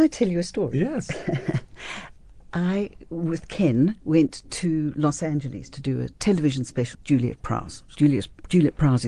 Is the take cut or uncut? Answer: cut